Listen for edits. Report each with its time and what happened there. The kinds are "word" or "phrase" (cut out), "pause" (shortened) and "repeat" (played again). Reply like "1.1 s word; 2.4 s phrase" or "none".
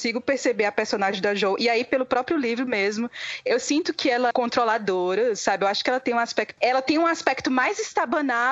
4.3 s phrase; 6.6 s word